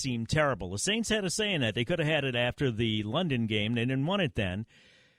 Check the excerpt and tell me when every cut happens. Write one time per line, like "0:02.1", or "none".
none